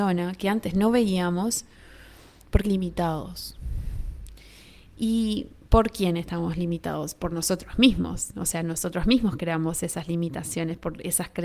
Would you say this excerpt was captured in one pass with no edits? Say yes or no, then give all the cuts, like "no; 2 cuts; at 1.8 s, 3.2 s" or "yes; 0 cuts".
no; 1 cut; at 2.6 s